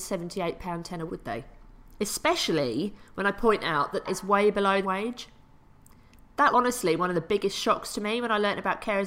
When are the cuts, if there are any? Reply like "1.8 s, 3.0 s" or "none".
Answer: 1.1 s, 4.1 s, 4.8 s, 6.5 s